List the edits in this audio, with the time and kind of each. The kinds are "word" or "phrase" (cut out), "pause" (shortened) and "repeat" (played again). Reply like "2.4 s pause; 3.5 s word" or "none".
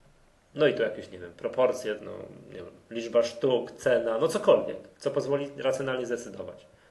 2.0 s phrase; 4.9 s pause